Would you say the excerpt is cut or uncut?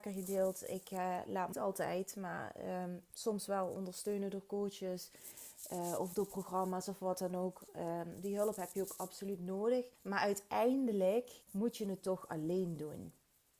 cut